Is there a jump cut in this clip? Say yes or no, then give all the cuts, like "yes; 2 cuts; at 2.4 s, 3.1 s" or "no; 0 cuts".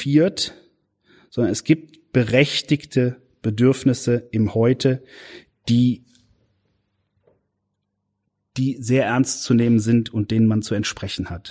no; 0 cuts